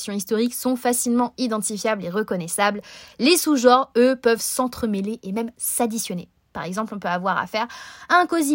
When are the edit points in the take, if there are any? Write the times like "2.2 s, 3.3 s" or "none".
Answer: none